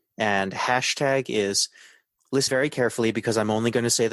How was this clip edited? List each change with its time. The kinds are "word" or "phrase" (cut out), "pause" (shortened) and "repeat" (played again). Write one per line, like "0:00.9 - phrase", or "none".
0:02.5 - phrase